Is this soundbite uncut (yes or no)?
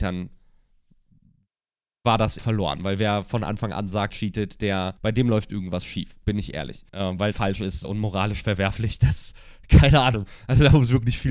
no